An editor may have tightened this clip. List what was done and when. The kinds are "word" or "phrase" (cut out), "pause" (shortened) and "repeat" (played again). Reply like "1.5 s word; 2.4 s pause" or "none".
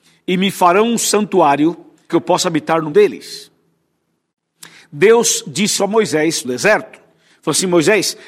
2.1 s word; 2.9 s word; 5.8 s word; 6.4 s word